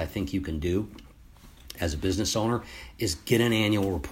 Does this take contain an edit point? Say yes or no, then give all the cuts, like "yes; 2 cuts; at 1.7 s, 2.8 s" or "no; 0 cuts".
no; 0 cuts